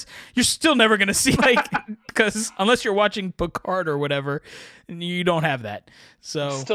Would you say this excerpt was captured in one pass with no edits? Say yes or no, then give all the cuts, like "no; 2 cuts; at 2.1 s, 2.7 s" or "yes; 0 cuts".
no; 1 cut; at 1.4 s